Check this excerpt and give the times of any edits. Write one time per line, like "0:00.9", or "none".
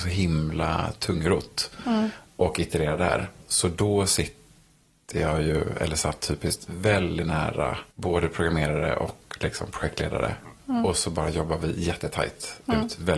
0:07.9